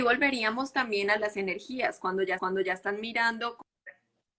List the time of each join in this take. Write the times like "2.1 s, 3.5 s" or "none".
1.2 s, 2.4 s